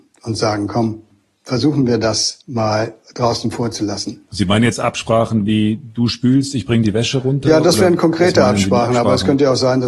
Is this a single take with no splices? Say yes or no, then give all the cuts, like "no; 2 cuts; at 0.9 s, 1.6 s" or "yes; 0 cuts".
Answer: yes; 0 cuts